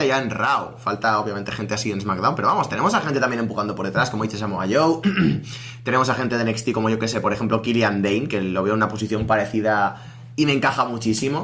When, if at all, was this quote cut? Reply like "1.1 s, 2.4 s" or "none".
none